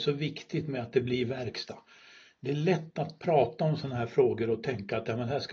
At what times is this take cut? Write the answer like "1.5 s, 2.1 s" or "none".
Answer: none